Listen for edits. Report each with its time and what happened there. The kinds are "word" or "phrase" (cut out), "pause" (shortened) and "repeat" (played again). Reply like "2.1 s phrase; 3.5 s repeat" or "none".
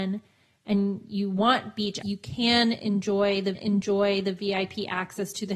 2.0 s word; 3.5 s repeat